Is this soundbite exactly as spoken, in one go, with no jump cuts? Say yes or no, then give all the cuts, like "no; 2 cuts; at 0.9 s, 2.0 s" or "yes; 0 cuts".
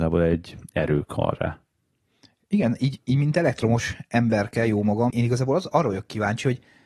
no; 1 cut; at 5.1 s